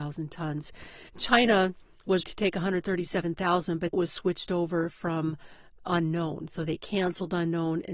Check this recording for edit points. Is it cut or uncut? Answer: cut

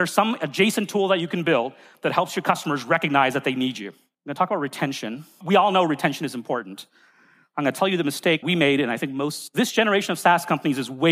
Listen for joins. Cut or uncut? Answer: cut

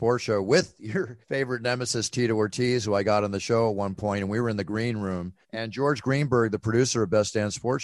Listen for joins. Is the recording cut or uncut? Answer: cut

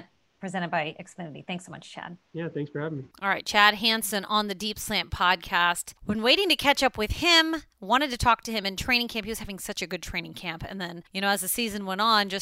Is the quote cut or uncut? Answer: cut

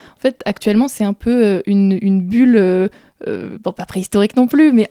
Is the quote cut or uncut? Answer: uncut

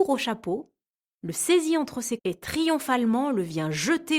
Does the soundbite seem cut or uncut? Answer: cut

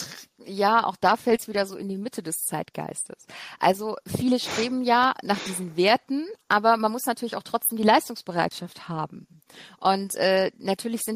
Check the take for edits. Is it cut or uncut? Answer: uncut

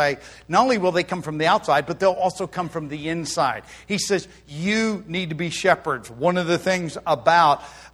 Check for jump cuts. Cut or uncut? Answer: uncut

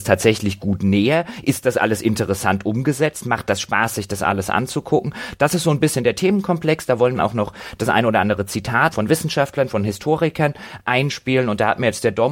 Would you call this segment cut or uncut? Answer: cut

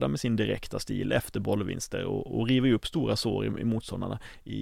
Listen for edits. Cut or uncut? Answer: uncut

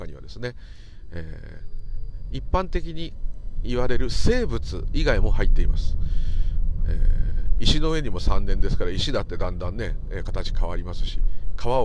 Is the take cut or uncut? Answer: uncut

